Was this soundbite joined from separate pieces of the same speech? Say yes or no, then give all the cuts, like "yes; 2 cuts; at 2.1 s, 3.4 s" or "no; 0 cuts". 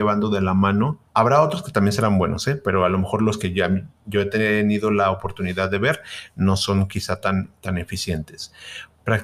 yes; 1 cut; at 1.1 s